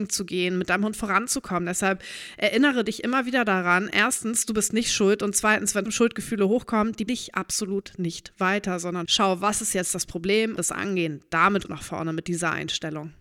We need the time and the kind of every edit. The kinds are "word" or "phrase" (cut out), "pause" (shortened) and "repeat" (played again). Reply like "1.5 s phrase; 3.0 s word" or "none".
5.9 s word; 7.1 s word; 9.1 s phrase; 10.6 s phrase; 11.6 s word